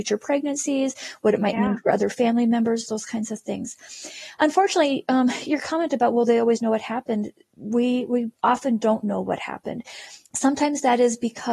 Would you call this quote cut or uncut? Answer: cut